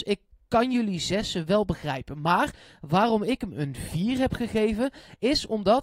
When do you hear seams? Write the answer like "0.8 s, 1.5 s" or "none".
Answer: none